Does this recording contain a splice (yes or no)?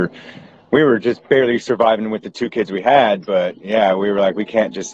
no